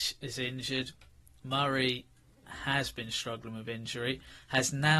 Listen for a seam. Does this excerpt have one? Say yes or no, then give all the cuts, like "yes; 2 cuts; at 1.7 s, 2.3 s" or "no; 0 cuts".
no; 0 cuts